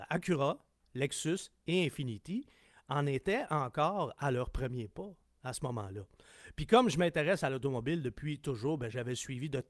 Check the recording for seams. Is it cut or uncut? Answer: uncut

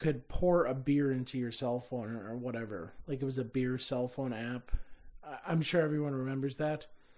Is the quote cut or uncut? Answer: uncut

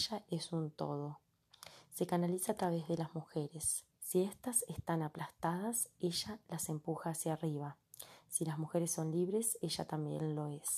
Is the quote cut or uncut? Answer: cut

